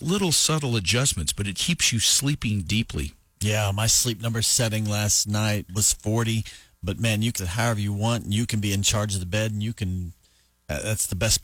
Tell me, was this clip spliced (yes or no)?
yes